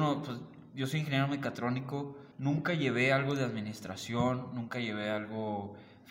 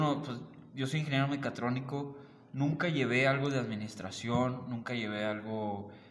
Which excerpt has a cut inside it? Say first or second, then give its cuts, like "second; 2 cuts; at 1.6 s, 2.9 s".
first; 1 cut; at 2.3 s